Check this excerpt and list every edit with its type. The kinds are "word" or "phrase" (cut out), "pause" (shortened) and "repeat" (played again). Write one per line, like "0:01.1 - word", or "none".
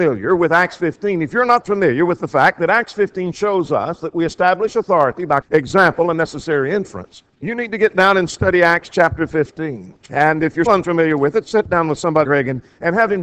0:05.4 - word
0:07.3 - pause
0:10.0 - pause
0:10.7 - word
0:12.2 - word

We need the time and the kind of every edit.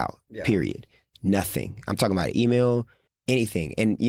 0:03.1 - word

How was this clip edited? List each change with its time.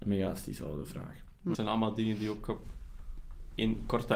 0:01.5 - word

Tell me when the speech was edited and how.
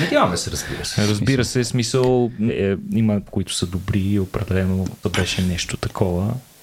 0:02.5 - word
0:03.3 - word
0:05.0 - word

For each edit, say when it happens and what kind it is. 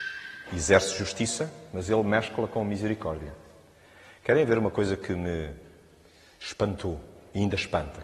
none

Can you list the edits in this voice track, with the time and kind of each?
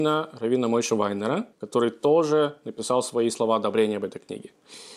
0:01.5 - pause

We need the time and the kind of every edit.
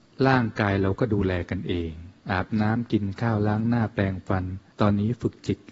0:02.2 - pause
0:04.7 - pause

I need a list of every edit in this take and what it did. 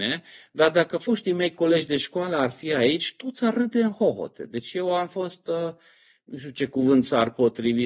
none

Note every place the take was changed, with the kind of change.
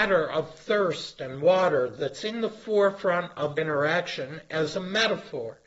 0:03.6 - word

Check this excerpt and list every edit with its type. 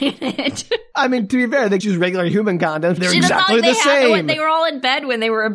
0:01.8 - word
0:03.0 - phrase

